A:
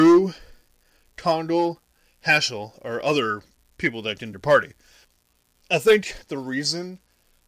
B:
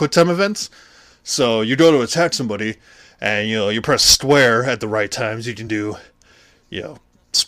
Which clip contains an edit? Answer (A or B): A